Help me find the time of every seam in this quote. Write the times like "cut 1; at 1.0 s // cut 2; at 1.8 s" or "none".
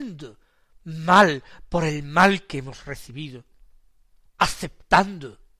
none